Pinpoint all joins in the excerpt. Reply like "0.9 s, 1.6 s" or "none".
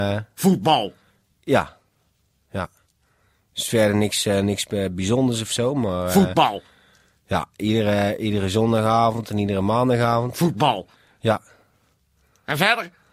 none

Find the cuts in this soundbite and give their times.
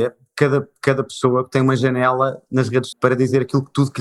2.9 s

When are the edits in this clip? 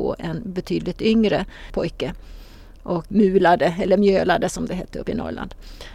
none

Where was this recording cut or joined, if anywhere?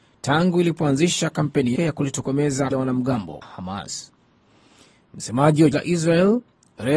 1.8 s, 2.7 s, 3.4 s, 5.7 s

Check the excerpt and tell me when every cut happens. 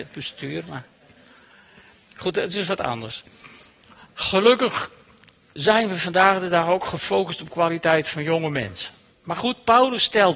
none

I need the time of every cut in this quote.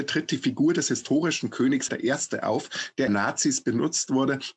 1.9 s, 3.1 s

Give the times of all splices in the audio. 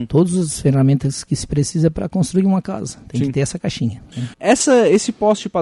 4.3 s

